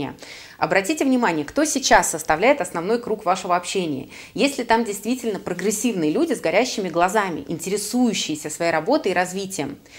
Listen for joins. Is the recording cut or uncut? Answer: uncut